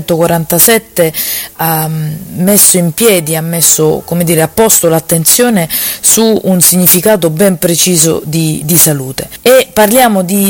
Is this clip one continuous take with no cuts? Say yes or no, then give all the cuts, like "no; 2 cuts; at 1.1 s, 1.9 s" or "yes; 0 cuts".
no; 2 cuts; at 1.6 s, 8.6 s